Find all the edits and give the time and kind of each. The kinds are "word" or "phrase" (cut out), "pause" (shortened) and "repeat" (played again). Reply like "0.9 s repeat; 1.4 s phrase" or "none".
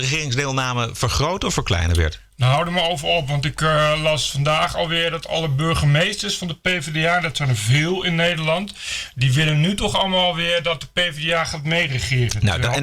none